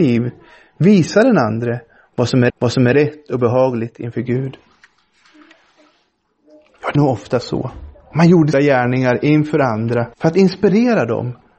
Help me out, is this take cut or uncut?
cut